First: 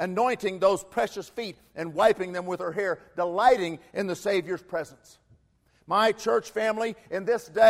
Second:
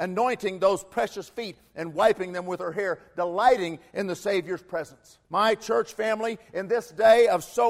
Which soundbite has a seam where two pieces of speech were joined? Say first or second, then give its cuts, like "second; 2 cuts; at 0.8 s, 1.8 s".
second; 1 cut; at 5.2 s